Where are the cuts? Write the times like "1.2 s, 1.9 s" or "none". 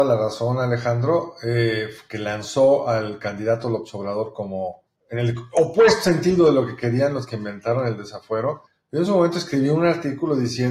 none